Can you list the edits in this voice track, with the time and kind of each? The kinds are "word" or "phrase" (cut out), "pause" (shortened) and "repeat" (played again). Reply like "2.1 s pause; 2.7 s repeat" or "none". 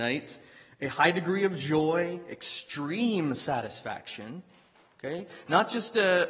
none